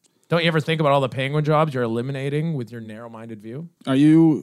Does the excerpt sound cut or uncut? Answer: uncut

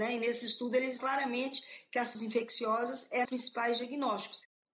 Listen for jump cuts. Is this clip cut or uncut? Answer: cut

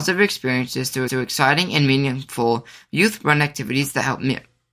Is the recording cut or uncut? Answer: cut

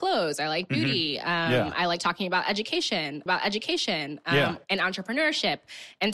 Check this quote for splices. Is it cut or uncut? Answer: cut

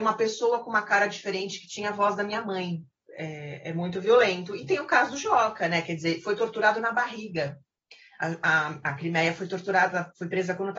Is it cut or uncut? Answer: uncut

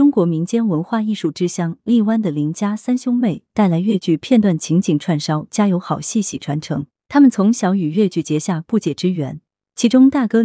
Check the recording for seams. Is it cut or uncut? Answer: uncut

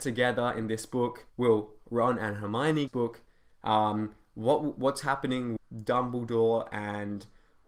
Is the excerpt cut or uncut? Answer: cut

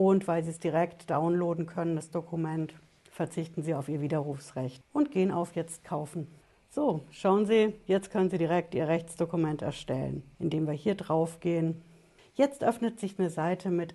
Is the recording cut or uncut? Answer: uncut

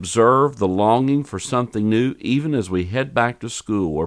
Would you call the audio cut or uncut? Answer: uncut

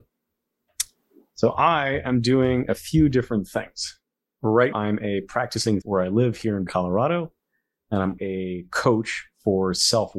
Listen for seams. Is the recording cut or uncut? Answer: cut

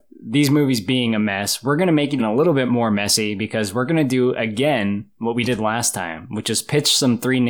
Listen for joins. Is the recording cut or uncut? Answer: cut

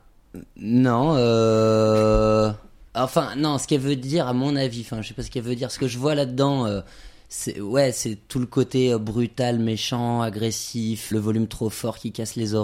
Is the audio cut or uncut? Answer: cut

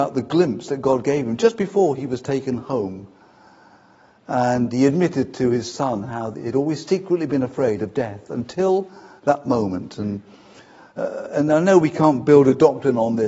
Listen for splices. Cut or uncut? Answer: uncut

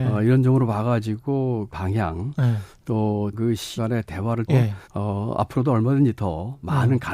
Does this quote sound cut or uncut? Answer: cut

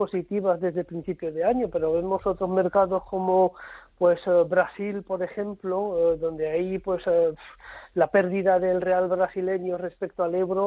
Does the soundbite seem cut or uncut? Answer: uncut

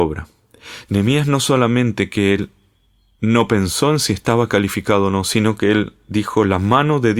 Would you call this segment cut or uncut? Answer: uncut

